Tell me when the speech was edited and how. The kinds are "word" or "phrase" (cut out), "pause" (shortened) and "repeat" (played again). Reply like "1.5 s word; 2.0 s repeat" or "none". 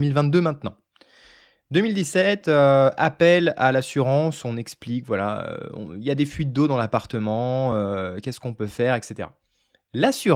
none